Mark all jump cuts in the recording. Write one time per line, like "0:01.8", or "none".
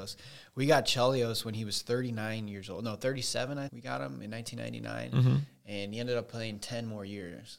0:03.7